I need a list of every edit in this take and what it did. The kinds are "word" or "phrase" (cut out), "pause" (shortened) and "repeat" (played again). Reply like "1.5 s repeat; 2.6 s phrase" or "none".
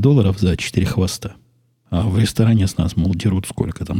1.7 s pause

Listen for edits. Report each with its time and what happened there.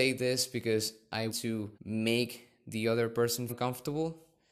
1.3 s word; 1.7 s pause; 3.5 s word

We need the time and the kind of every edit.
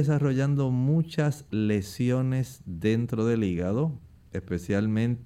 none

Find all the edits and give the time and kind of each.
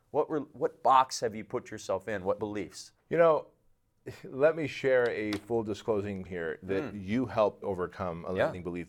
2.4 s word; 3.0 s pause; 6.3 s word; 7.6 s word

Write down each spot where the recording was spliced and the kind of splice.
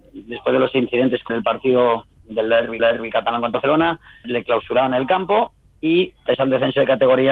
1.3 s word; 2.8 s repeat; 3.5 s word; 4.2 s word; 6.3 s word

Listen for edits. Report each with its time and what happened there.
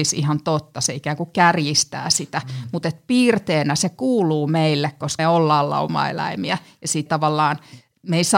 5.2 s word; 7.1 s word

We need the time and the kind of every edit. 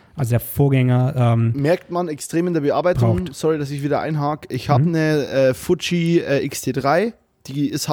none

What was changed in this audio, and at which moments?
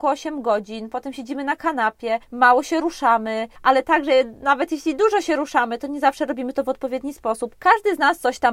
none

